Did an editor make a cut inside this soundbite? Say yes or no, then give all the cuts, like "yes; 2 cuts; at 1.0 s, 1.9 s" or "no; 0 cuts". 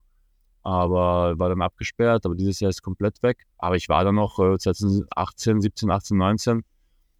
yes; 1 cut; at 3.5 s